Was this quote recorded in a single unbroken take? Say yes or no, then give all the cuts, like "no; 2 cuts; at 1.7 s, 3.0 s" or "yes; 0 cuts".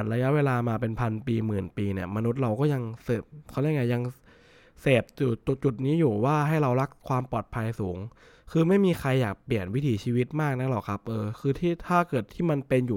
yes; 0 cuts